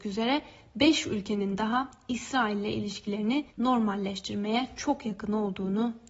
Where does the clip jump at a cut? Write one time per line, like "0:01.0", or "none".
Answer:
0:03.5